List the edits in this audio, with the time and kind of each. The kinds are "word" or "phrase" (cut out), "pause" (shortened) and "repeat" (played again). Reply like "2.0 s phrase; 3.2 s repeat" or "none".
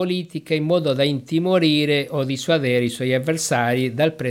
none